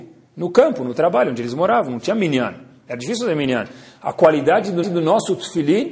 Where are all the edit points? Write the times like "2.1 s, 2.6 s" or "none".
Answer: 4.8 s